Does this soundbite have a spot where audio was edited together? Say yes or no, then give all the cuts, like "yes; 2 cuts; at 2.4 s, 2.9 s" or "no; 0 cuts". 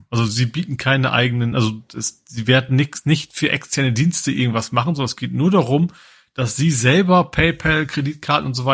no; 0 cuts